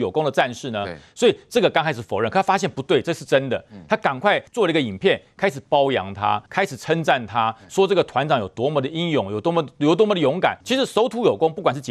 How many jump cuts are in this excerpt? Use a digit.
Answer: 3